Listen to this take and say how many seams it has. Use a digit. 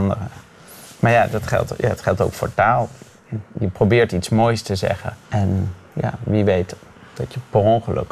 1